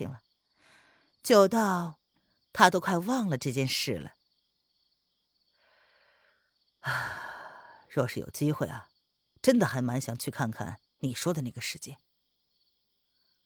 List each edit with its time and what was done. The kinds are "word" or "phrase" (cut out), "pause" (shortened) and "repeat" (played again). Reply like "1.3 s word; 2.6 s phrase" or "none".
10.9 s pause